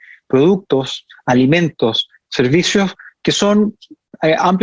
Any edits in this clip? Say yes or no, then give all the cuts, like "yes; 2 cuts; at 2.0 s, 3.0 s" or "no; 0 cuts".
no; 0 cuts